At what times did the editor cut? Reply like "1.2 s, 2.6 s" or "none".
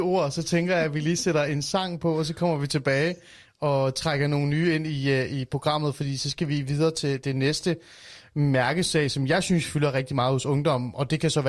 none

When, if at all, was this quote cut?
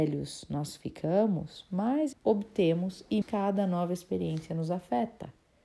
2.1 s, 3.2 s

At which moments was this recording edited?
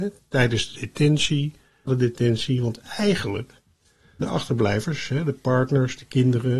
1.9 s, 4.2 s

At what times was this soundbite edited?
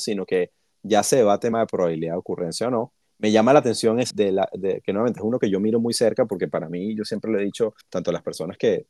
1.5 s, 3.0 s, 4.1 s, 7.8 s

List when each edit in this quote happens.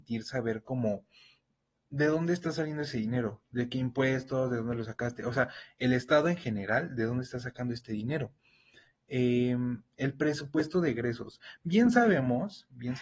none

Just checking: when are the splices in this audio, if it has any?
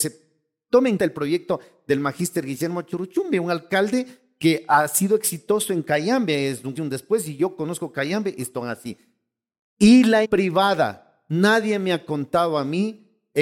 1.0 s, 6.8 s, 10.2 s

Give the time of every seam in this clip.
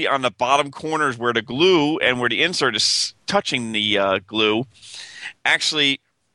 3.2 s

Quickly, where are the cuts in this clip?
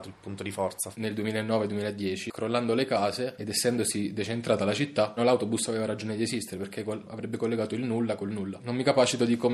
5.2 s

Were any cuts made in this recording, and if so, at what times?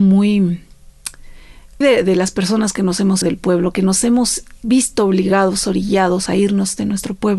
1.8 s, 3.2 s, 4.6 s, 6.3 s

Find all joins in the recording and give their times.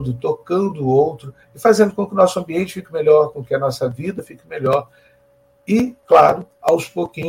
1.4 s, 6.0 s

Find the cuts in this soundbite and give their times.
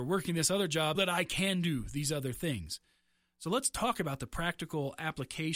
0.9 s

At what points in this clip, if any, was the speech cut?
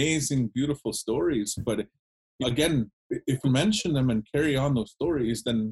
2.4 s, 2.9 s, 3.4 s

